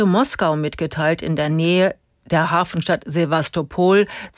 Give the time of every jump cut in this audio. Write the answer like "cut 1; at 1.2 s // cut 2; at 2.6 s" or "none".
none